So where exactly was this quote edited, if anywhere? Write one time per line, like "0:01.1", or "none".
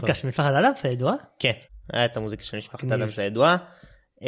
0:01.6

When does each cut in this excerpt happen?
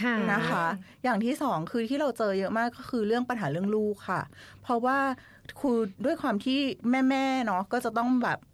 0:06.8

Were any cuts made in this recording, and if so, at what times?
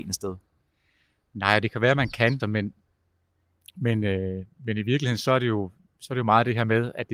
0:02.4

